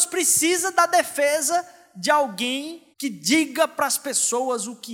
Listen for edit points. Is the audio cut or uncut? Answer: cut